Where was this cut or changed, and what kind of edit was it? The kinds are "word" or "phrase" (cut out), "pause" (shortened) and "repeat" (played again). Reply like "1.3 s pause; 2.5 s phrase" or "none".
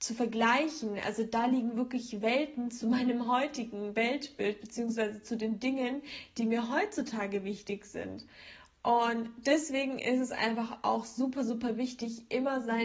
none